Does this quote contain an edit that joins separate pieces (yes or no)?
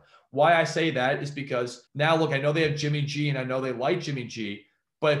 yes